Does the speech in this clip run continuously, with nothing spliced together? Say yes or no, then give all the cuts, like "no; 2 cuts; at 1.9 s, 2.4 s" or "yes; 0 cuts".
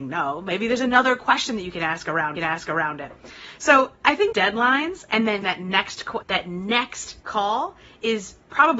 no; 5 cuts; at 2.4 s, 4.3 s, 5.4 s, 6.2 s, 7.2 s